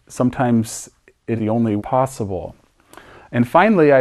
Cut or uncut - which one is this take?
cut